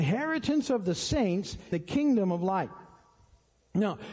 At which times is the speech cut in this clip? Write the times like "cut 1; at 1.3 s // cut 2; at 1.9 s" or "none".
cut 1; at 1.7 s